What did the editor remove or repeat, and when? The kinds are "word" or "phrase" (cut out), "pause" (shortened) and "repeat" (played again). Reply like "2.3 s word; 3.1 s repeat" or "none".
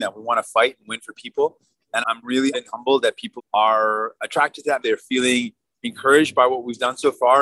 2.0 s word; 2.5 s word; 3.4 s word; 4.8 s word